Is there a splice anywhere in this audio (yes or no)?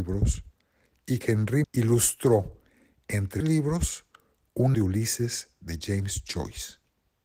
yes